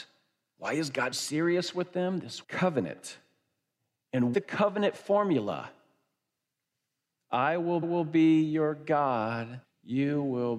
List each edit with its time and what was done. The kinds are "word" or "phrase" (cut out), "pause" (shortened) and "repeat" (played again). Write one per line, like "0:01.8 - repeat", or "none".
0:01.1 - word
0:02.4 - word
0:04.3 - phrase
0:07.8 - repeat
0:09.6 - pause